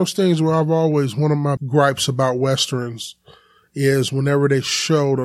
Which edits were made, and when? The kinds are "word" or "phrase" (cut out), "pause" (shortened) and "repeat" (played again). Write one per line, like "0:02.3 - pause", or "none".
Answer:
0:01.6 - word